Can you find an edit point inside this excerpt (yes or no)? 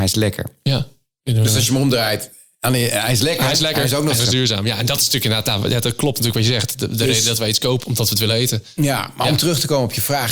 yes